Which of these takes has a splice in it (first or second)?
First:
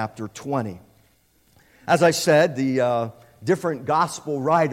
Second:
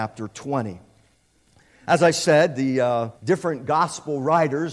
second